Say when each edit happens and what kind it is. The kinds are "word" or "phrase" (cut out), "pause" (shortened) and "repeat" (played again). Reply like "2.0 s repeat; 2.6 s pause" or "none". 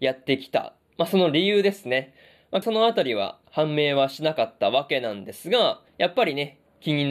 2.6 s phrase; 3.4 s pause; 5.9 s pause